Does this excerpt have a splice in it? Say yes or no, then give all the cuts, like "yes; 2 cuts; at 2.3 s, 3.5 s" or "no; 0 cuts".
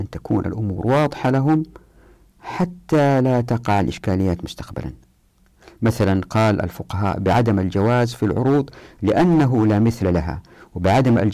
no; 0 cuts